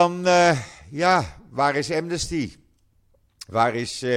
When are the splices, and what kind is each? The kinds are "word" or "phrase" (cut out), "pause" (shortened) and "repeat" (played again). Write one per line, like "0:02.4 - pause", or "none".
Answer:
none